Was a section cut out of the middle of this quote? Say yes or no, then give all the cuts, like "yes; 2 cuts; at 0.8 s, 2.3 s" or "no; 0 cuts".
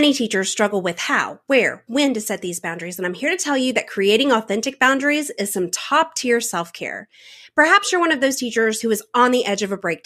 no; 0 cuts